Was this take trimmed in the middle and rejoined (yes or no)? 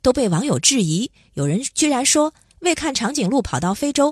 no